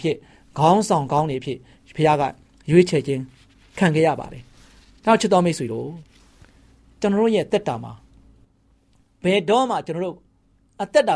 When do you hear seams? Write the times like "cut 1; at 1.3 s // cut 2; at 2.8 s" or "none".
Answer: none